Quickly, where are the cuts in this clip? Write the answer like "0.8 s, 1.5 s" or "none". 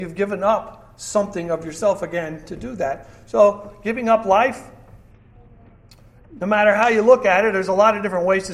none